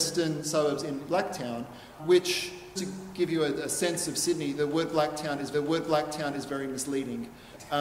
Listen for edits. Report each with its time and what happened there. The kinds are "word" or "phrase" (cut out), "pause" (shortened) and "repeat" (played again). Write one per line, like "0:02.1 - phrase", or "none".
0:01.1 - word
0:02.0 - word
0:02.8 - word
0:05.5 - repeat